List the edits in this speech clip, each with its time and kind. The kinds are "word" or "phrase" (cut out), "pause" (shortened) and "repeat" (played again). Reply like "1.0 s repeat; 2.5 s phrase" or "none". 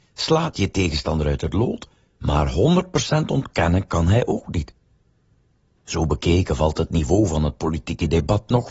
none